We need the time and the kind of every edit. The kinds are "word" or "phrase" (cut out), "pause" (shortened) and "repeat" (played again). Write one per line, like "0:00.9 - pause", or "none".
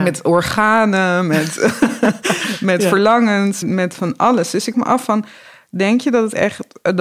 0:03.6 - word
0:04.7 - word